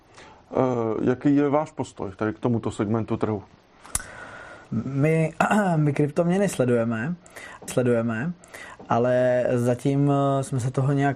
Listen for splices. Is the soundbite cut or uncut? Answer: cut